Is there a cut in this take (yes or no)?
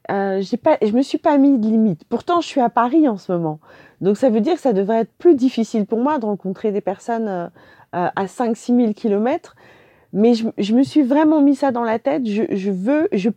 no